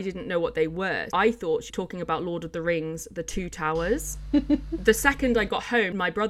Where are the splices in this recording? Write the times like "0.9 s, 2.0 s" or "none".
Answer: 1.1 s, 1.7 s